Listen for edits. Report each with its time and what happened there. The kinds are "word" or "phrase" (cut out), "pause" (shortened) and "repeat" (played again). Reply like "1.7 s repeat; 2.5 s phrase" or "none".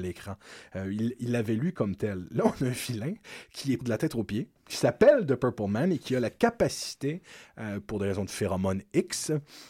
3.8 s word